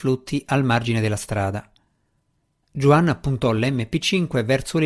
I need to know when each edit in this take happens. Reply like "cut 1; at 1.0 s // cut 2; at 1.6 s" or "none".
none